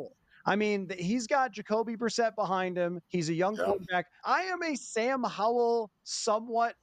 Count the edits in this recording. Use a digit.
2